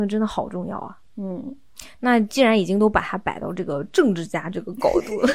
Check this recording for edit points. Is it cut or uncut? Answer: cut